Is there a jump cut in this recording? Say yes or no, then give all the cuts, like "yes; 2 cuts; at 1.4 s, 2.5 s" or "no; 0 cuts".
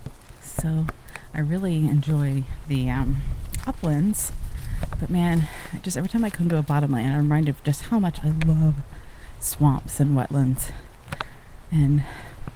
no; 0 cuts